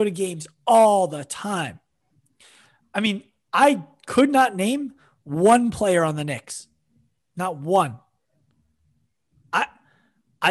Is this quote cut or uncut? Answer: uncut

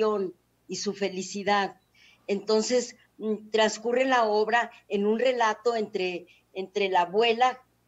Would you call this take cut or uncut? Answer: uncut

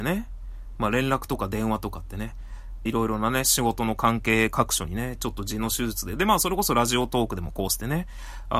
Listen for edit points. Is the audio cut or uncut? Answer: cut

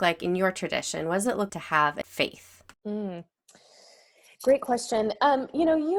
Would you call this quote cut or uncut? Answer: cut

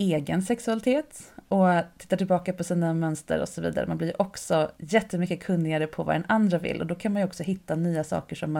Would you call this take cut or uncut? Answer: cut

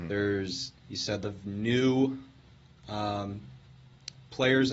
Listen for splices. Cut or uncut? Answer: cut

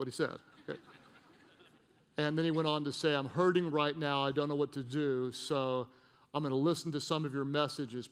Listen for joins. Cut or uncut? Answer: uncut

